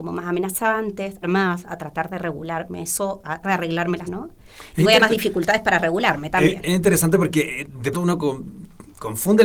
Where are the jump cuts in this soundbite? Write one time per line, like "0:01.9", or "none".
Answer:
0:01.2
0:03.4
0:04.0
0:05.0
0:07.9